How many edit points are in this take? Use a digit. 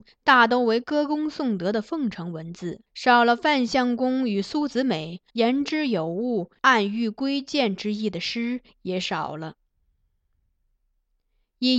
2